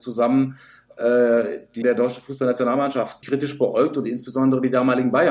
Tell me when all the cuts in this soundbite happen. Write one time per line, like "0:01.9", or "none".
0:01.8
0:03.2